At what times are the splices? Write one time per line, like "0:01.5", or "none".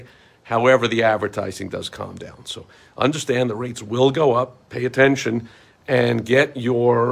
none